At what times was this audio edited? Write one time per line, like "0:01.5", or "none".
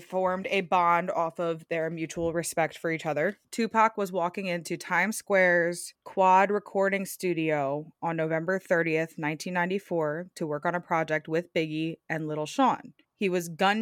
none